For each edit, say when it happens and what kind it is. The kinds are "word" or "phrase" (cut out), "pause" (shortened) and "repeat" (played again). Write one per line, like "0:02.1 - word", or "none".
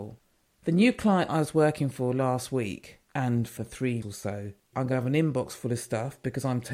0:01.3 - word
0:03.0 - pause
0:03.6 - word
0:04.0 - word
0:04.7 - phrase